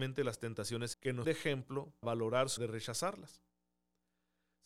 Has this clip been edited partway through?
yes; 4 cuts; at 0.9 s, 1.2 s, 2.0 s, 2.6 s

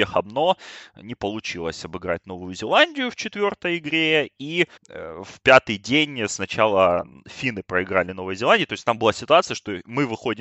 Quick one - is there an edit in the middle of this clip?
yes; 1 cut; at 4.8 s

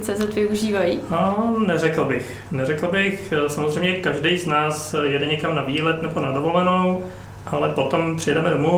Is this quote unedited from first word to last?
yes; 0 cuts

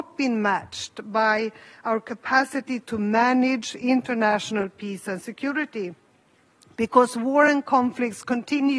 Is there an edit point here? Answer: no; 0 cuts

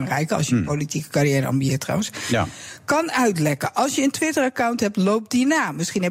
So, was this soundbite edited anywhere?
no; 0 cuts

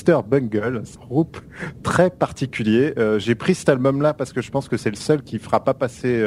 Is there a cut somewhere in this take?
yes; 1 cut; at 1.0 s

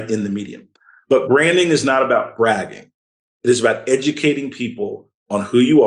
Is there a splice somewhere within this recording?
no; 0 cuts

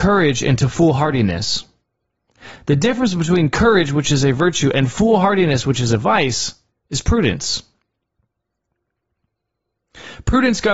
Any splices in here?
no; 0 cuts

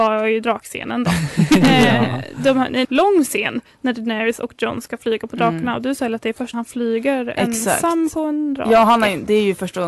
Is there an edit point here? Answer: yes; 2 cuts; at 2.8 s, 6.5 s

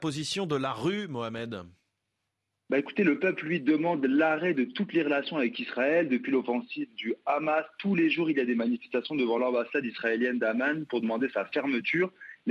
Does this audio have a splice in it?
no; 0 cuts

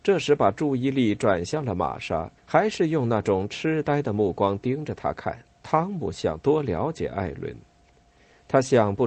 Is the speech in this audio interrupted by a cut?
yes; 2 cuts; at 2.4 s, 5.5 s

